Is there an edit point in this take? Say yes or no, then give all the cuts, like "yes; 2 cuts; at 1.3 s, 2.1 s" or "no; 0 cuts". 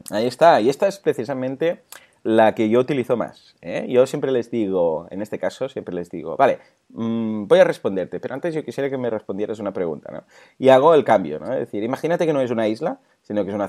no; 0 cuts